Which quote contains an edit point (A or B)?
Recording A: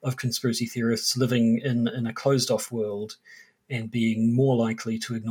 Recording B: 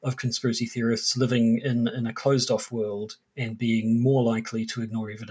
B